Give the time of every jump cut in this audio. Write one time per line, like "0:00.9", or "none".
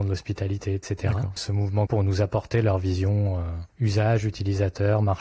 0:01.4
0:01.9
0:03.7